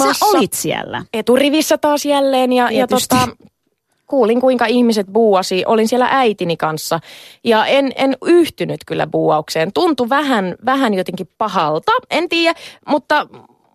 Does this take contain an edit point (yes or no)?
yes